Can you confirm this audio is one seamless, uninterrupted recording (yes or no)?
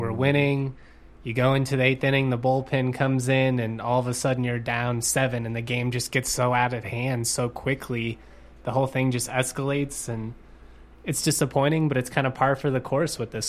yes